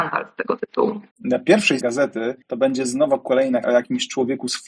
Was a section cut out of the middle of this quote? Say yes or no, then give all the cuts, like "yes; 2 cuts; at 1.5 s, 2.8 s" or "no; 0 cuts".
yes; 4 cuts; at 1.1 s, 1.8 s, 2.4 s, 3.6 s